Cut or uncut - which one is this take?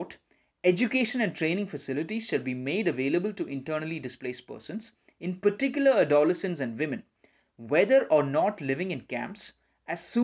uncut